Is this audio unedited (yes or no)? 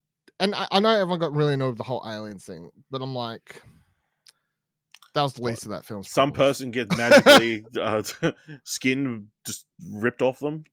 yes